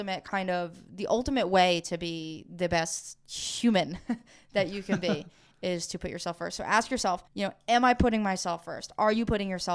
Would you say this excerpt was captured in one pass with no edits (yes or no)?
no